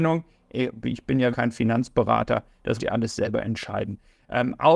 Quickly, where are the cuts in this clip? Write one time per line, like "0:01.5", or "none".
0:01.3
0:02.8